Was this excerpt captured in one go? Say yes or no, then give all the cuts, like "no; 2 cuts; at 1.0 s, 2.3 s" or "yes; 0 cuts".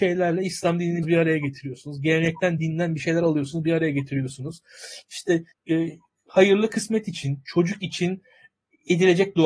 no; 2 cuts; at 1.0 s, 5.5 s